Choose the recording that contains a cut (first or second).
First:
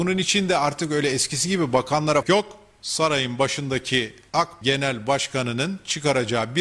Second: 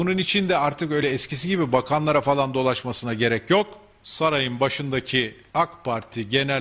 first